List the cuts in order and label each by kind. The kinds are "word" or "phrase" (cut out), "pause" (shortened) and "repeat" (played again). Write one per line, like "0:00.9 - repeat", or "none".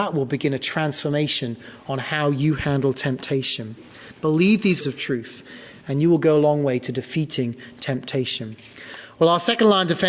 0:04.8 - word